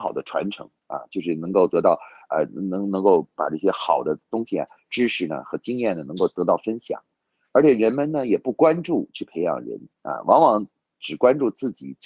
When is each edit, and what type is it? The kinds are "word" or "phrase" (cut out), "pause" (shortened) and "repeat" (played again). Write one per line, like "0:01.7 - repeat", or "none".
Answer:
none